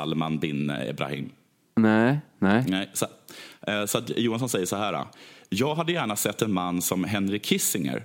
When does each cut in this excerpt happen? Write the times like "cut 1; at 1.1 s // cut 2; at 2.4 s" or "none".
none